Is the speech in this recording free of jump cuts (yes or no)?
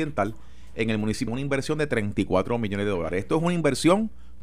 no